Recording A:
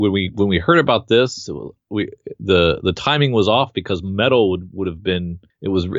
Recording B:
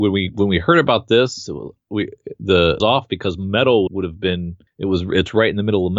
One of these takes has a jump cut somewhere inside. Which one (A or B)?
B